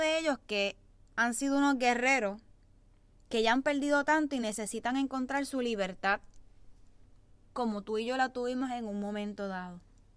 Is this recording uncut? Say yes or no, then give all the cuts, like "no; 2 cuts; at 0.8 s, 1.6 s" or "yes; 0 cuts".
yes; 0 cuts